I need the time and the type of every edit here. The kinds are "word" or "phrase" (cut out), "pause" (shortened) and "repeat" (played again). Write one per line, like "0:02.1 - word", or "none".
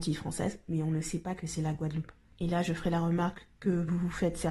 none